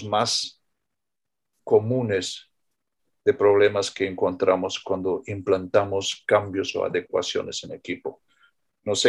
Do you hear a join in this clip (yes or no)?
no